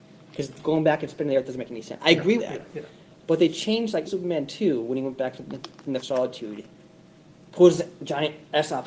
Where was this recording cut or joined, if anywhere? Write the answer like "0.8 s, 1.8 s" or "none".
2.4 s, 4.1 s, 6.0 s